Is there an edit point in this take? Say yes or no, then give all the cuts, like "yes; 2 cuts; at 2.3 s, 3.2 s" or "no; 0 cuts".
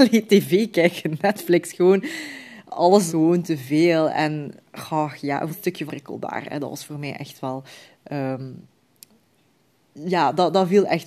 yes; 3 cuts; at 3.1 s, 5.5 s, 5.9 s